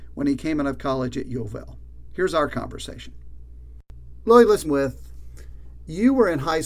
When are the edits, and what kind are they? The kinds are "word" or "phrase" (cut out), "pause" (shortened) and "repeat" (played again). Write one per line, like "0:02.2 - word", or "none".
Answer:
0:04.6 - word